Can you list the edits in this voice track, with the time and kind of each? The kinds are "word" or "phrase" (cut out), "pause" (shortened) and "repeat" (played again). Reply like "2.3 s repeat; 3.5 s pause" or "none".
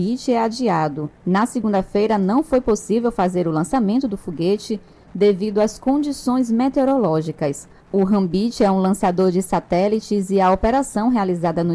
1.2 s pause

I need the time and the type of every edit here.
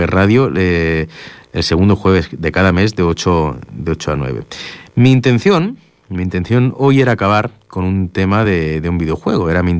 none

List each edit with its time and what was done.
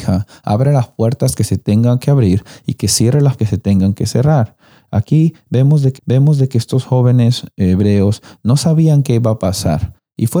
3.4 s word; 6.0 s repeat

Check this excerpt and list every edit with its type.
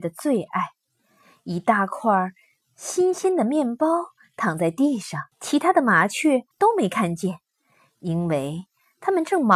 5.3 s pause; 6.5 s pause

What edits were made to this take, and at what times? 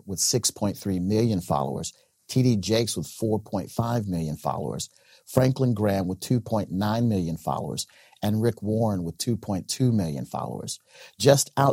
none

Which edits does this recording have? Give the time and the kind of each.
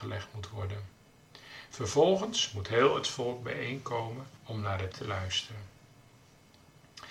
4.4 s pause; 4.9 s word

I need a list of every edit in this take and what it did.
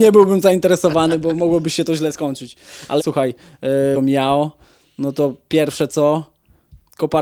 3.0 s word; 3.9 s phrase

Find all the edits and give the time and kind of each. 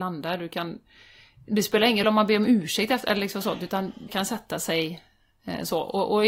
2.0 s word; 4.1 s word

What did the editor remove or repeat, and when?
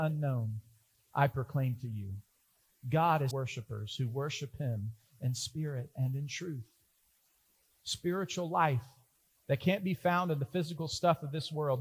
3.3 s word

